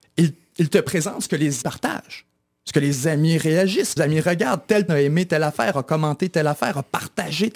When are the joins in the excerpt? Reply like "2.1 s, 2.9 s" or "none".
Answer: 1.6 s, 4.0 s, 4.9 s